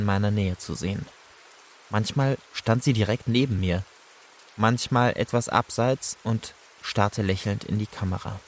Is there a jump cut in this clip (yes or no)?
no